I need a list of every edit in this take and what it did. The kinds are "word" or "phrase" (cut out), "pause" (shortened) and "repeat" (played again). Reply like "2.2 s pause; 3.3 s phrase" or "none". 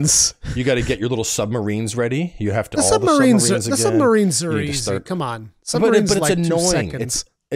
2.7 s word